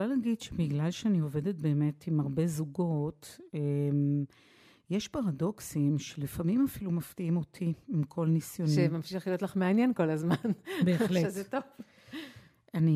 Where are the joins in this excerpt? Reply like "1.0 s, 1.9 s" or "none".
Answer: none